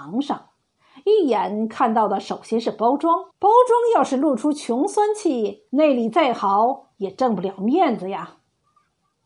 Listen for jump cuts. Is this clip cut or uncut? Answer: cut